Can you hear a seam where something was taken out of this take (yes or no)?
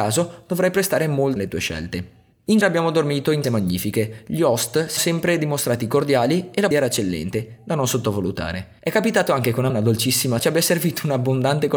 yes